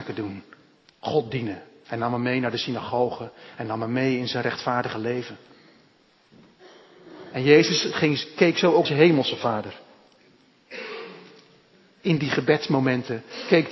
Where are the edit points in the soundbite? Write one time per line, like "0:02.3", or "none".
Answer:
0:08.9